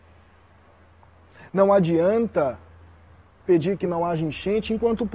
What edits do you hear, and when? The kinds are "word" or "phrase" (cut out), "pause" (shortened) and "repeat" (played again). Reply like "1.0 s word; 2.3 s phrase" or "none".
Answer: none